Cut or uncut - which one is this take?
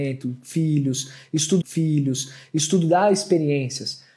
cut